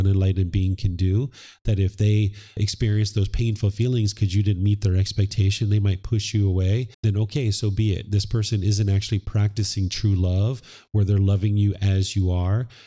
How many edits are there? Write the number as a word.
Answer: one